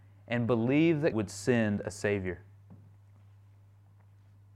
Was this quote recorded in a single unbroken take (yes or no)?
no